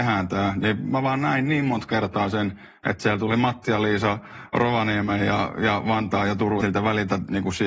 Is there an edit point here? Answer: yes; 1 cut; at 6.6 s

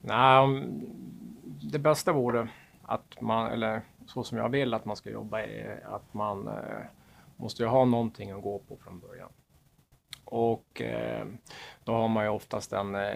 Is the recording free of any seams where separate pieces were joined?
yes; 0 cuts

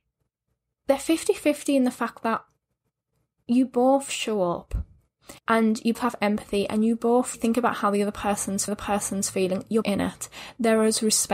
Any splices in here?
yes; 5 cuts; at 5.4 s, 5.9 s, 7.3 s, 8.7 s, 9.8 s

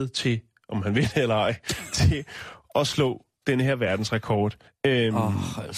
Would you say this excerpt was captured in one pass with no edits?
no; 1 cut; at 4.7 s

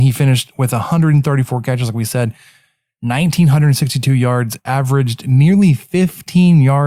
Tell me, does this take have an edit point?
no; 0 cuts

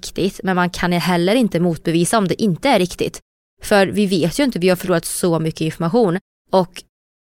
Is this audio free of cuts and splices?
yes; 0 cuts

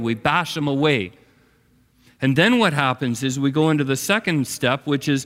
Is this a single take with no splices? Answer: yes; 0 cuts

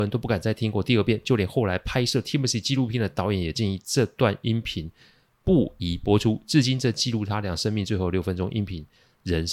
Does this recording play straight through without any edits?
yes; 0 cuts

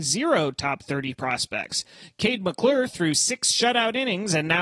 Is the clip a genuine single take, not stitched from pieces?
yes; 0 cuts

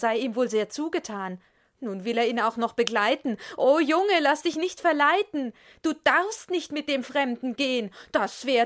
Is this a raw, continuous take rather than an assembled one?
yes; 0 cuts

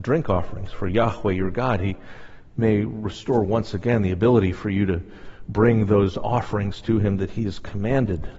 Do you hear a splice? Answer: no; 0 cuts

